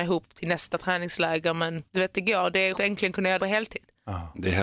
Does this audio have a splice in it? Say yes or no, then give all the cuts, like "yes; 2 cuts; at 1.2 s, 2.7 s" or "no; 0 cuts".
yes; 3 cuts; at 1.9 s, 2.7 s, 3.4 s